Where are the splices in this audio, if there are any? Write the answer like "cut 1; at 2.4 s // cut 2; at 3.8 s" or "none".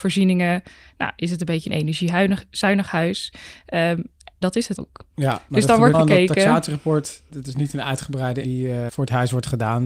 cut 1; at 4.4 s // cut 2; at 4.8 s // cut 3; at 5.9 s // cut 4; at 7.3 s // cut 5; at 8.4 s // cut 6; at 8.9 s